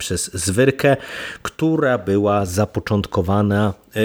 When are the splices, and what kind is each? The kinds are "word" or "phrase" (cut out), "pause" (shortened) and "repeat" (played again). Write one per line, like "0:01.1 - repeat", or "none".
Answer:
none